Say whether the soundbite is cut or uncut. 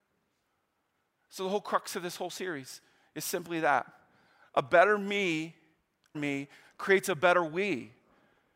cut